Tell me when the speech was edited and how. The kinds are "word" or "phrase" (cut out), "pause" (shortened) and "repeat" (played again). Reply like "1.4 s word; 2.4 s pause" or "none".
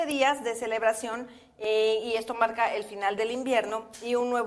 none